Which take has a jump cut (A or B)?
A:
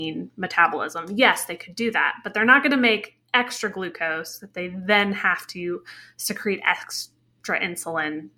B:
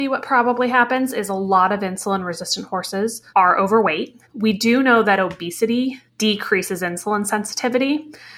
B